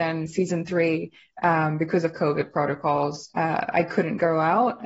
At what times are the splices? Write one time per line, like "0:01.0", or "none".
0:03.3